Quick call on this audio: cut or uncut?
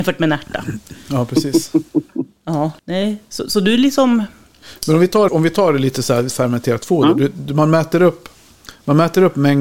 cut